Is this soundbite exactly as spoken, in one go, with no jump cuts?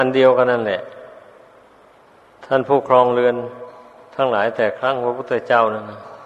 yes; 0 cuts

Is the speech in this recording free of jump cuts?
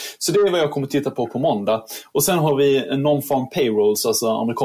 yes; 0 cuts

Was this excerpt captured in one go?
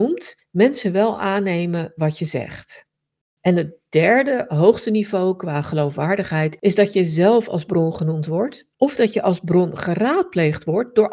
no; 1 cut; at 8.7 s

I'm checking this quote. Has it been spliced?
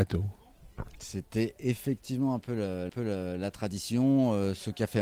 yes; 1 cut; at 2.9 s

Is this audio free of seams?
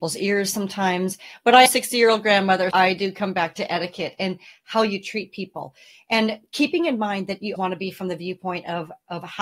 no; 3 cuts; at 1.7 s, 2.7 s, 7.6 s

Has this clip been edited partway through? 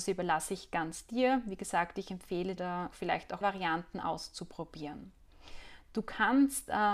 yes; 3 cuts; at 2.6 s, 2.9 s, 3.4 s

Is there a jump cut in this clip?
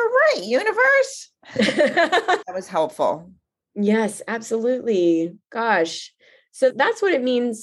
no; 0 cuts

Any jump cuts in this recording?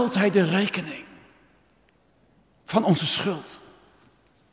no; 0 cuts

